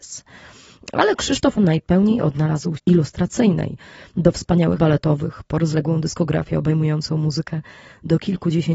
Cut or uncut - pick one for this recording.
cut